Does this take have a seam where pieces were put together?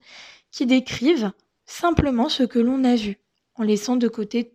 no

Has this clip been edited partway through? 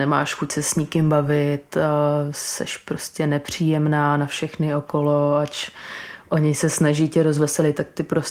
no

